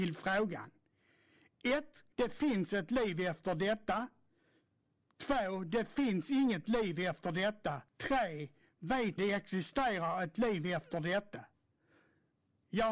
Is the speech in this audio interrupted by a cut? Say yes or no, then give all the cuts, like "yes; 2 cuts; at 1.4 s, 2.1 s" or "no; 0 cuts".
yes; 3 cuts; at 2.1 s, 7.9 s, 9.2 s